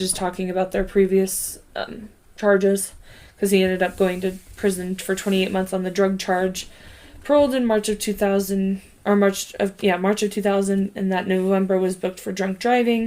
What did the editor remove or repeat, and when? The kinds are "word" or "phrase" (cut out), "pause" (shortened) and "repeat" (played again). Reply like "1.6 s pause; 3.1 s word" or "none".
none